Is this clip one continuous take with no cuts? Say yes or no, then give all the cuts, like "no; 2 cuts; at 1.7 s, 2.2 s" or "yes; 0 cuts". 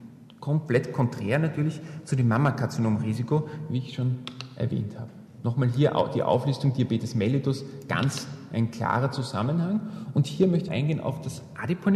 no; 2 cuts; at 5.3 s, 10.7 s